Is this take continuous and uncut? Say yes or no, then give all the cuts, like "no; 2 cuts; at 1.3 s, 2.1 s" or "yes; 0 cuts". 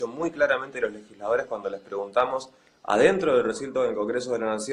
yes; 0 cuts